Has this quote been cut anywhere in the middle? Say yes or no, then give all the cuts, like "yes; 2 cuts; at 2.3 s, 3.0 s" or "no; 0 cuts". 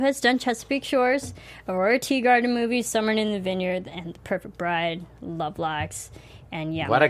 no; 0 cuts